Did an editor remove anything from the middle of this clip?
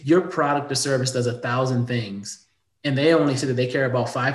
no; 0 cuts

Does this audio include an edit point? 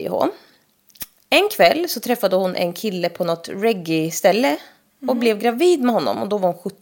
no; 0 cuts

